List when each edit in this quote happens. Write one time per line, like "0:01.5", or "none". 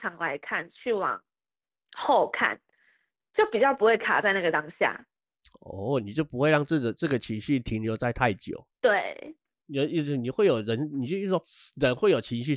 0:08.7